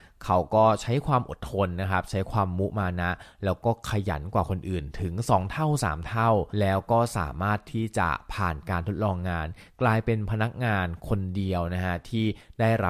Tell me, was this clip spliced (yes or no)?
yes